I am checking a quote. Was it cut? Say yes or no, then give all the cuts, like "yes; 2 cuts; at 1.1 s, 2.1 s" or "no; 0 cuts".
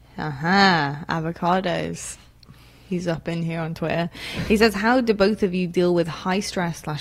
no; 0 cuts